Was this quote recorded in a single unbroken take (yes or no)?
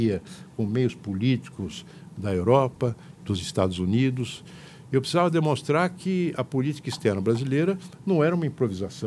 yes